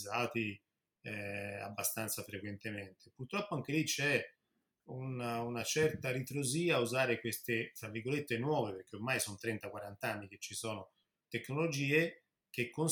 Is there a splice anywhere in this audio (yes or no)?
no